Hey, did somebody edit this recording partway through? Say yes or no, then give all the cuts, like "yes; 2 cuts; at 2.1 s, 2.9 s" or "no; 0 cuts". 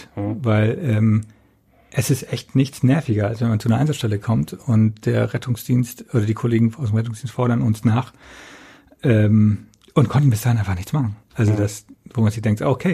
no; 0 cuts